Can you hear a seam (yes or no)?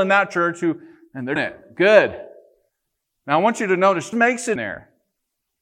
yes